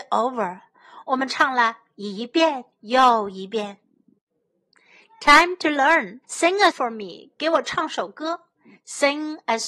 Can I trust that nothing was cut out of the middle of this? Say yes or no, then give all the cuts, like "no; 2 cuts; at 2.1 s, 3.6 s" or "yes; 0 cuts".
no; 3 cuts; at 2.7 s, 6.2 s, 6.7 s